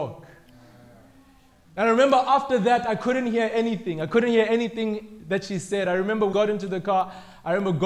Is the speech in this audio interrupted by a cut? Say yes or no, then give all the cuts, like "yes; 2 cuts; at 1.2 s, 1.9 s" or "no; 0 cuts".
yes; 1 cut; at 6.3 s